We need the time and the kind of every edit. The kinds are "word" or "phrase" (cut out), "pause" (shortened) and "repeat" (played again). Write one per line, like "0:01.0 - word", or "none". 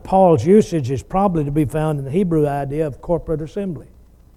none